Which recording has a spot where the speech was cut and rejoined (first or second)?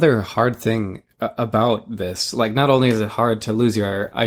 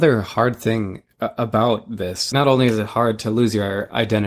second